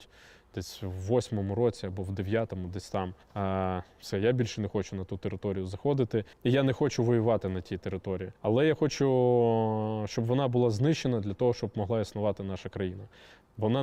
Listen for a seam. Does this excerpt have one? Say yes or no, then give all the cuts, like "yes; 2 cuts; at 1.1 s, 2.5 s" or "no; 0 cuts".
yes; 3 cuts; at 3.2 s, 6.3 s, 8.4 s